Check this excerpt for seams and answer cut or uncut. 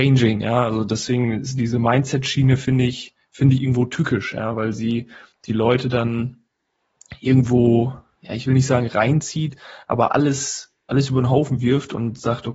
uncut